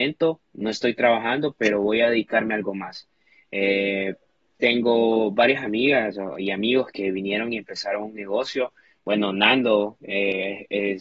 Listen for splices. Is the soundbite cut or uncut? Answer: uncut